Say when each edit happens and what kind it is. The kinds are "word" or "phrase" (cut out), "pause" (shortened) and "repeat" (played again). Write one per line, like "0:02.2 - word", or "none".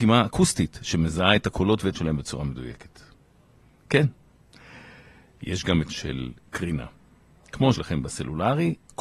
0:01.9 - word
0:05.9 - word
0:07.7 - word